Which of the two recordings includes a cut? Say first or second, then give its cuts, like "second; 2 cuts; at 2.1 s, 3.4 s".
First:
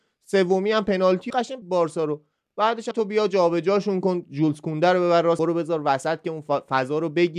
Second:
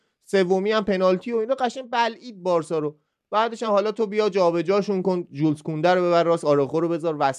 first; 4 cuts; at 1.3 s, 1.6 s, 2.9 s, 5.4 s